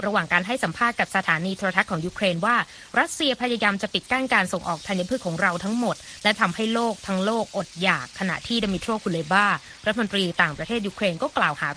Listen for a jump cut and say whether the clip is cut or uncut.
uncut